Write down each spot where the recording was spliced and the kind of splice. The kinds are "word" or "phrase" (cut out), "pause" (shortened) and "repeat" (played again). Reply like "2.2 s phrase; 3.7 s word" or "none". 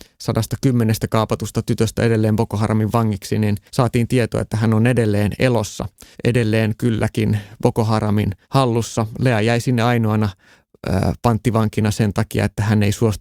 3.7 s pause; 6.1 s pause; 8.4 s pause